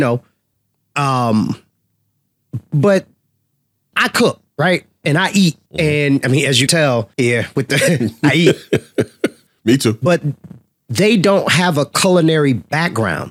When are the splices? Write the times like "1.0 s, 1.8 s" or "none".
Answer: 3.9 s, 4.5 s, 5.7 s, 6.7 s, 7.1 s, 9.5 s